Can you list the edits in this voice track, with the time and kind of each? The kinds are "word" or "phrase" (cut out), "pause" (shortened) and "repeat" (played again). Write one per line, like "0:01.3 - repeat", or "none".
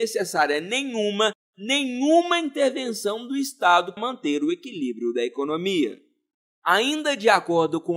0:04.0 - word